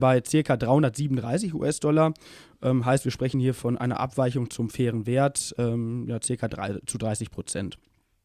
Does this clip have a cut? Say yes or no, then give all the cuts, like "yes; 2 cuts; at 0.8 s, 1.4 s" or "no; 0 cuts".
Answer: no; 0 cuts